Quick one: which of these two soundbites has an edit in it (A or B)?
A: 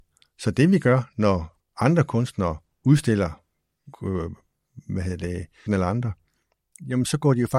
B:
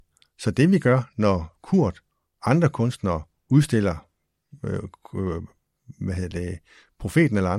A